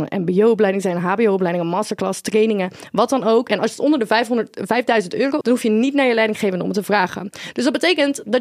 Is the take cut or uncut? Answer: cut